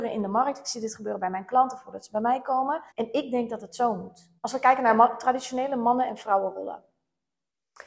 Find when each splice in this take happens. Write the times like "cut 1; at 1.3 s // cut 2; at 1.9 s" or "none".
cut 1; at 2.9 s // cut 2; at 4.4 s